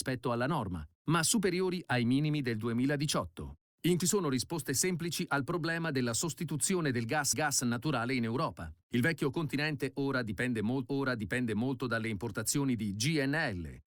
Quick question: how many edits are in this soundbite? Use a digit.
3